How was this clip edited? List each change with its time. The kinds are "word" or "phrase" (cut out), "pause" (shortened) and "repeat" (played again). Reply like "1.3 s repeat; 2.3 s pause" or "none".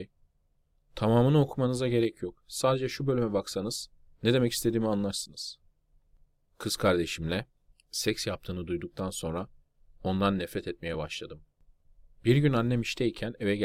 none